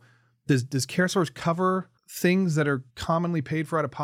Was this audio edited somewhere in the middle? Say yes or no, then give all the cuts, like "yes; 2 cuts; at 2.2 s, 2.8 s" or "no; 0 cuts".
yes; 2 cuts; at 2.0 s, 2.9 s